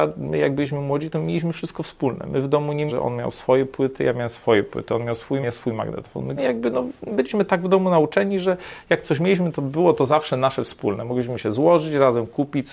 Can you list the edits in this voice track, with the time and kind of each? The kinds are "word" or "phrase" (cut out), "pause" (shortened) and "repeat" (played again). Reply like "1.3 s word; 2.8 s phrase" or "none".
2.9 s word; 5.4 s word; 6.4 s word